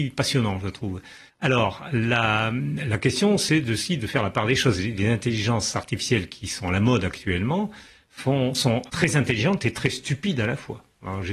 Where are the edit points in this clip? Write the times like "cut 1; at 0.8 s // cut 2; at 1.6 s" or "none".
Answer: cut 1; at 1.3 s // cut 2; at 8.9 s